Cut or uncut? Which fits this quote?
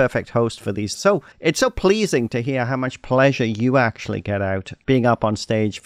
cut